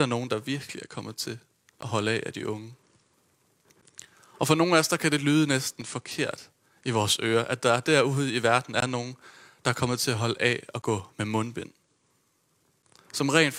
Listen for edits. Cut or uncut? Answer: uncut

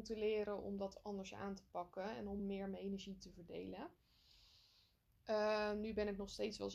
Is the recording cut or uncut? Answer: uncut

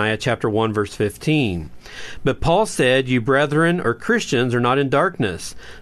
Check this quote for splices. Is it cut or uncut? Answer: uncut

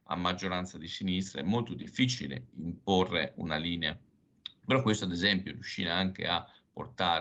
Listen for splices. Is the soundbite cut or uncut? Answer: uncut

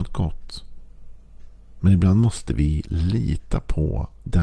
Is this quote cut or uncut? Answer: uncut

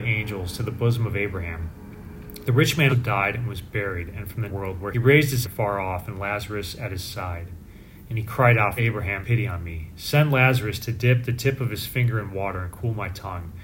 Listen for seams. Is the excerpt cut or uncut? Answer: cut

